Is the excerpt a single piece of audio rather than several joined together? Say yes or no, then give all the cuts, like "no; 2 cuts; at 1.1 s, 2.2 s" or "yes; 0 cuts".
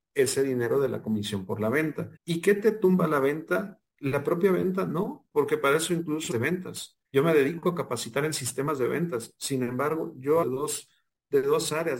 no; 4 cuts; at 2.2 s, 6.3 s, 7.0 s, 10.4 s